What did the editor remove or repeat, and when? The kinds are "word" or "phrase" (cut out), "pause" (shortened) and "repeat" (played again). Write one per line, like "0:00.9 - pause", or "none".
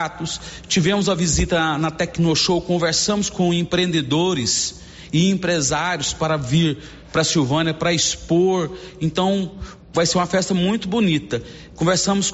0:09.8 - pause